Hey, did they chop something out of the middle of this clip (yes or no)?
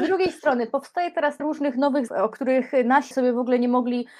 yes